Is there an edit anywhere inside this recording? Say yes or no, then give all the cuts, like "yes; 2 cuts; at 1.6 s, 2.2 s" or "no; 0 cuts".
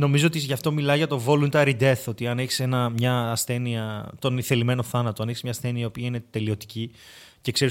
no; 0 cuts